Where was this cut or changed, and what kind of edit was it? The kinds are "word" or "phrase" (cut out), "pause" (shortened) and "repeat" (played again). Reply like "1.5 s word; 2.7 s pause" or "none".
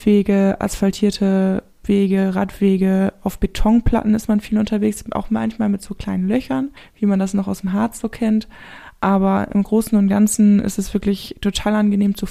6.8 s pause